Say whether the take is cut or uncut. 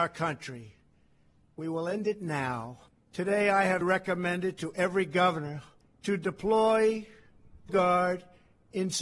cut